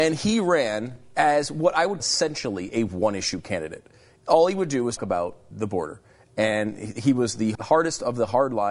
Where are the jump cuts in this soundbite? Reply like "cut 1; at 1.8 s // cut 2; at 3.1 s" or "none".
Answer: cut 1; at 2.0 s // cut 2; at 5.0 s // cut 3; at 5.5 s // cut 4; at 7.5 s